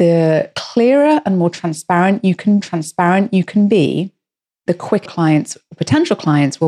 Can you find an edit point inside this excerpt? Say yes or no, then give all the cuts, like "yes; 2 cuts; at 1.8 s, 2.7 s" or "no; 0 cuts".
yes; 2 cuts; at 2.6 s, 5.1 s